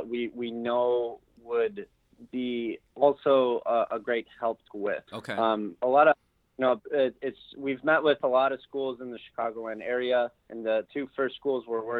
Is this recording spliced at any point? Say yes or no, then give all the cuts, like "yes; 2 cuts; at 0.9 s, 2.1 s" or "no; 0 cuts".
yes; 4 cuts; at 4.7 s, 5.1 s, 10.4 s, 10.9 s